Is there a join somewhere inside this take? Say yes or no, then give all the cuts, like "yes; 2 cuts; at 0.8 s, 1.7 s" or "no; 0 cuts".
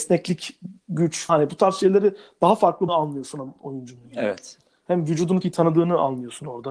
yes; 3 cuts; at 1.3 s, 2.9 s, 5.4 s